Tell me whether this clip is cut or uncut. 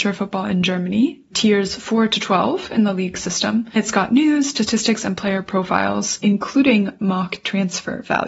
uncut